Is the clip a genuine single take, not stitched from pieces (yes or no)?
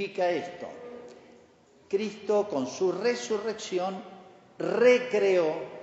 yes